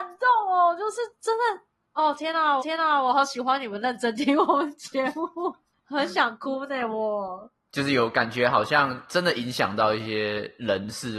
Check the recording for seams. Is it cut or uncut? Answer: cut